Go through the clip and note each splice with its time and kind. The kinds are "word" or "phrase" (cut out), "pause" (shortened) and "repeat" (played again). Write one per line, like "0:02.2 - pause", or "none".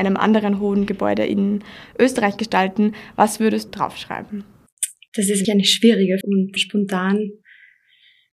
0:03.7 - word
0:05.4 - word
0:06.2 - word
0:06.6 - word